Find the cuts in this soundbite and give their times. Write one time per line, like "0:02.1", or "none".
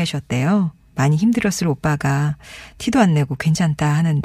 none